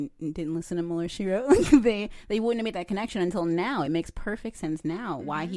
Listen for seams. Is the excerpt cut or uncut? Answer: uncut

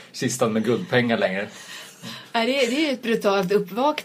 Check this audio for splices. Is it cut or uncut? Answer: cut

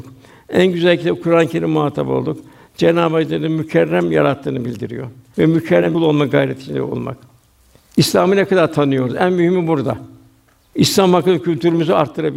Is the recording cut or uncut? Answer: cut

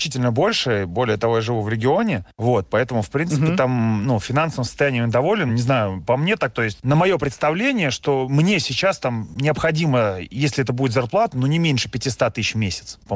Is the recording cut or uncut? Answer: cut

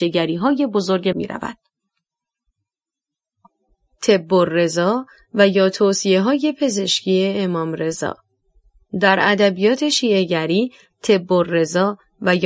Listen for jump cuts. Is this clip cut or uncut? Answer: cut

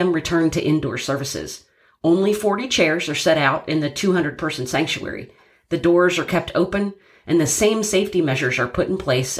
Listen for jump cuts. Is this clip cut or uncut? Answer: uncut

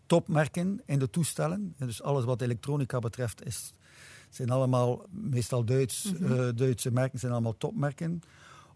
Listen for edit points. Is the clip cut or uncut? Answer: cut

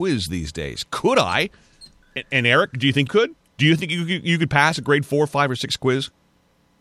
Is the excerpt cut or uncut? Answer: cut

